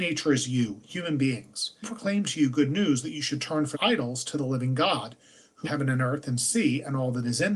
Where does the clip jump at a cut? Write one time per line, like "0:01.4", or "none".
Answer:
0:01.8
0:03.7
0:05.6